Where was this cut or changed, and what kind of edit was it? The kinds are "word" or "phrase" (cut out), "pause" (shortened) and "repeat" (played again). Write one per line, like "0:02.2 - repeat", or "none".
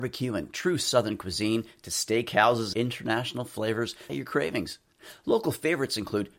0:02.7 - phrase
0:04.1 - phrase